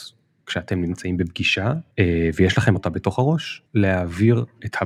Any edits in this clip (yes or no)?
yes